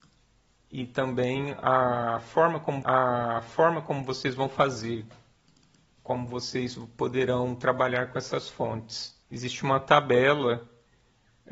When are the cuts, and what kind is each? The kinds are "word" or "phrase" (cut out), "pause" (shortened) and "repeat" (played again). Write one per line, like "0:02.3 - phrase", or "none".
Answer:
0:02.8 - repeat
0:06.0 - word
0:09.2 - pause